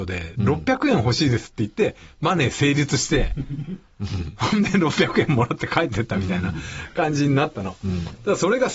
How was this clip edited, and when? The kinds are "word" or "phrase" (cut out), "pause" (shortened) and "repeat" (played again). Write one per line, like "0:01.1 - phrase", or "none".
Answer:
none